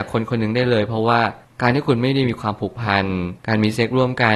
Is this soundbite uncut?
no; 1 cut; at 3.4 s

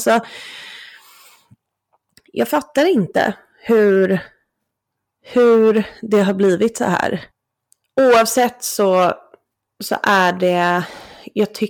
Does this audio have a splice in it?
no; 0 cuts

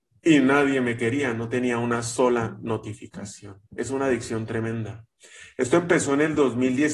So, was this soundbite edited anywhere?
yes; 1 cut; at 3.6 s

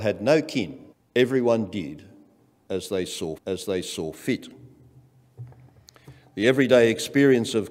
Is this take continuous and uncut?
no; 2 cuts; at 0.9 s, 3.4 s

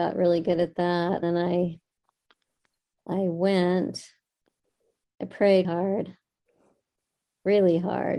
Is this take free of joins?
no; 2 cuts; at 1.2 s, 5.6 s

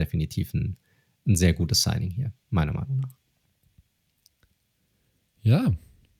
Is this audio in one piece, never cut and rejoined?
yes; 0 cuts

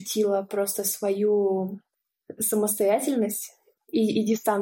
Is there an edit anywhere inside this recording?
yes; 1 cut; at 2.4 s

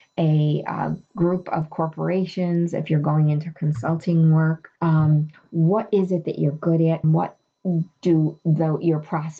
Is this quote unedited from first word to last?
no; 2 cuts; at 4.8 s, 7.0 s

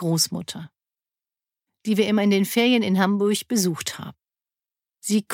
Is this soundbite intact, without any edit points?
yes; 0 cuts

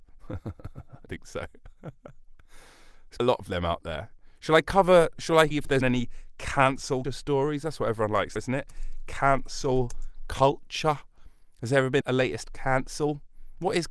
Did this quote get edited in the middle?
yes; 8 cuts; at 1.1 s, 3.2 s, 5.1 s, 5.5 s, 5.8 s, 7.0 s, 8.4 s, 12.0 s

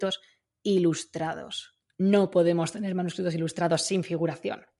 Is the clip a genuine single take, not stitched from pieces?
yes; 0 cuts

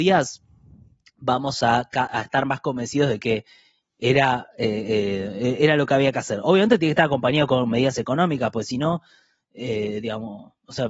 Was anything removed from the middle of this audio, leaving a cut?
no; 0 cuts

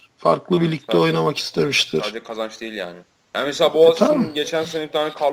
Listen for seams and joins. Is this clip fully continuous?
yes; 0 cuts

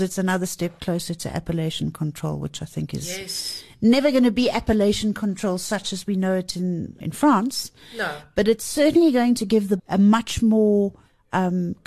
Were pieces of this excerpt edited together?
yes; 2 cuts; at 7.0 s, 9.8 s

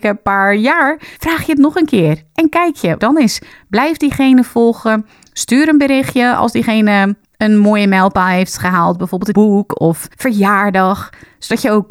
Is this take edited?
yes; 4 cuts; at 1.2 s, 3.0 s, 7.2 s, 9.3 s

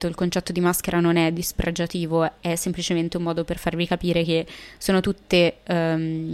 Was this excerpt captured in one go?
yes; 0 cuts

